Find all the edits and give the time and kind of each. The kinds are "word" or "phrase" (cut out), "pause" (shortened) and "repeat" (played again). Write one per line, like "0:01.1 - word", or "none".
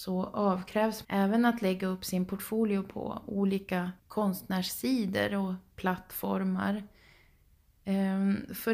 0:01.0 - word
0:04.0 - pause